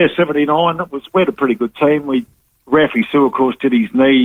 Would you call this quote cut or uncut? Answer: uncut